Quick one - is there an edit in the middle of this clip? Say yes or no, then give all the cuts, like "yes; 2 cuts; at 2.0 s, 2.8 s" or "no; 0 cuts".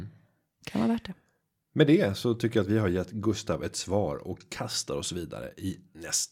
no; 0 cuts